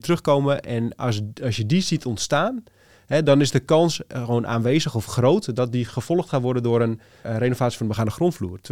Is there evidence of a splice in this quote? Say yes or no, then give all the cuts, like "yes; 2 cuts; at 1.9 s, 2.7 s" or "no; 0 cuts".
no; 0 cuts